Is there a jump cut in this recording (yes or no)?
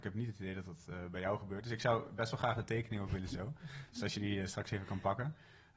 yes